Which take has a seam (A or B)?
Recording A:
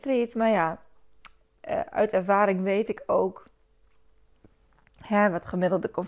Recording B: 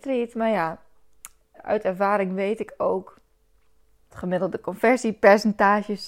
B